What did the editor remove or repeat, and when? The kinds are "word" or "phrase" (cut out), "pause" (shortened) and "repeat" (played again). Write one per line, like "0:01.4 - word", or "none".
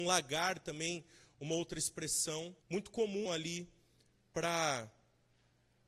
0:02.6 - pause
0:03.3 - word

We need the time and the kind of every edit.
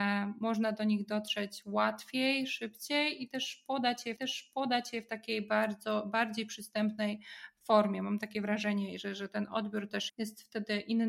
0:04.2 - repeat
0:10.1 - word

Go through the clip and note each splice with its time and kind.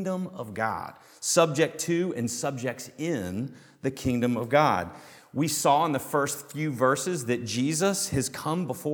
none

